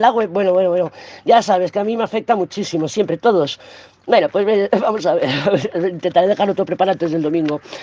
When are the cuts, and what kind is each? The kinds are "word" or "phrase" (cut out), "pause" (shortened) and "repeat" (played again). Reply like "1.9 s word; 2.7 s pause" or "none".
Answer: 2.9 s word